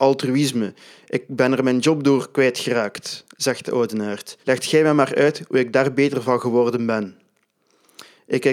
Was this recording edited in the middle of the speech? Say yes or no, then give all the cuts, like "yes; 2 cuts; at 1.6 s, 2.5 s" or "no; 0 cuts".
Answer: yes; 1 cut; at 4.4 s